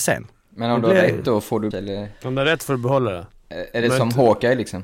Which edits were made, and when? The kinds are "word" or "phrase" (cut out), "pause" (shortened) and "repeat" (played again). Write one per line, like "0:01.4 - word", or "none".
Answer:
0:01.7 - phrase
0:02.2 - pause